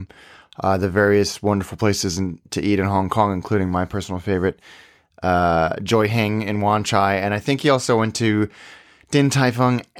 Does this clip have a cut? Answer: no; 0 cuts

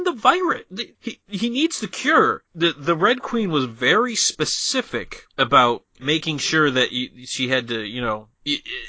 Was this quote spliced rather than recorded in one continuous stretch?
no; 0 cuts

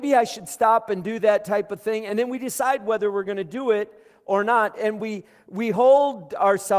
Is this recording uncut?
yes; 0 cuts

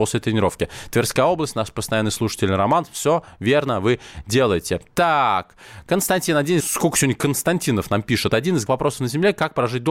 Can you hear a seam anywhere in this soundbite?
yes; 2 cuts; at 6.6 s, 8.7 s

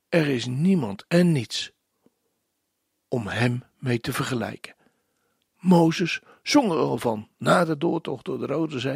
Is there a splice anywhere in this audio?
no; 0 cuts

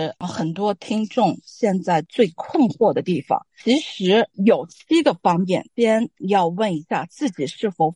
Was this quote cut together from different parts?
yes; 2 cuts; at 4.3 s, 5.7 s

